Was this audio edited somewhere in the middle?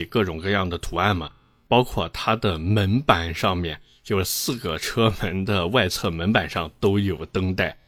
no; 0 cuts

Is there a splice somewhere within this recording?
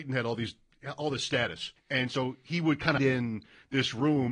yes; 2 cuts; at 1.8 s, 3.0 s

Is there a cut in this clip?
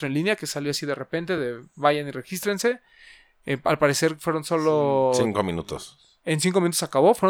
no; 0 cuts

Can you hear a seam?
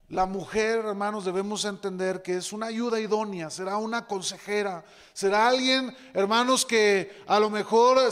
no; 0 cuts

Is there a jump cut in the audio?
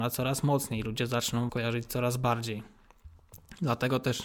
yes; 1 cut; at 1.5 s

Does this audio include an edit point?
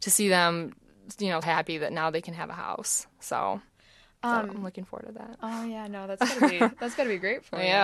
yes; 1 cut; at 1.4 s

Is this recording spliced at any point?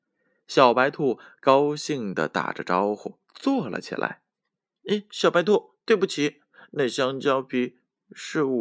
yes; 2 cuts; at 3.3 s, 4.3 s

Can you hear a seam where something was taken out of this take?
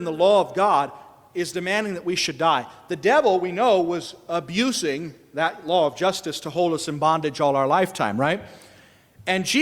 no; 0 cuts

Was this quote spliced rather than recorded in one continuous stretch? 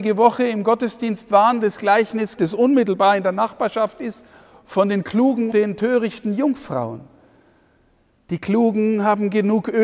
yes; 3 cuts; at 1.6 s, 2.4 s, 5.5 s

